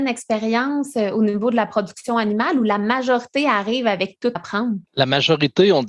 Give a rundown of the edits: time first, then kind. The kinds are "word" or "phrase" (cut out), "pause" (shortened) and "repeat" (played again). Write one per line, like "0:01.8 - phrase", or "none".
0:04.4 - word
0:04.9 - pause